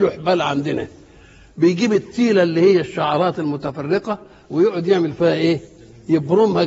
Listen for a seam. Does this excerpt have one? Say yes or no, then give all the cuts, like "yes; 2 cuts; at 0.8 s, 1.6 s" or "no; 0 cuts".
no; 0 cuts